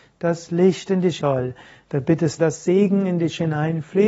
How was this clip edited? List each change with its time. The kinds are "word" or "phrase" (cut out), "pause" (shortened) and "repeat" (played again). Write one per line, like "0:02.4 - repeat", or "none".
0:01.2 - word
0:02.4 - word